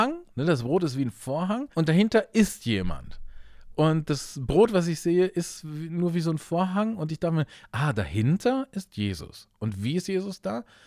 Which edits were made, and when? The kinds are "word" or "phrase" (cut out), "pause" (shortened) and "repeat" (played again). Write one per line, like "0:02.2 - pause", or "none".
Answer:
0:01.7 - pause